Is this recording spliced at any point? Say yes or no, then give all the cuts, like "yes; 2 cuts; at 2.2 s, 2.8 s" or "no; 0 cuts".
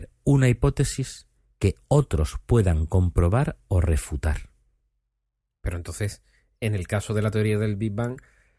no; 0 cuts